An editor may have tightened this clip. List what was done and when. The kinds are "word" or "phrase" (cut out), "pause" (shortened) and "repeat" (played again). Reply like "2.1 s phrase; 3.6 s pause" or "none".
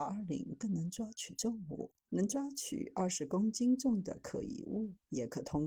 2.0 s pause